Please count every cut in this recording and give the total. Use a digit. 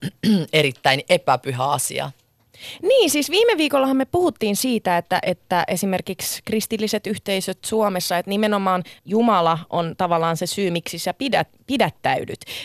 1